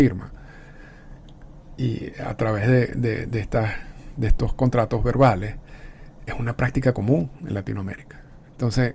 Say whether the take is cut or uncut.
uncut